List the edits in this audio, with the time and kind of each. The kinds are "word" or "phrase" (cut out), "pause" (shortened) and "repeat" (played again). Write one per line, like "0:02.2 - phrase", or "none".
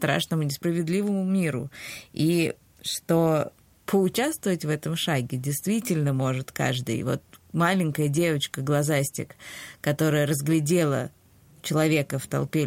none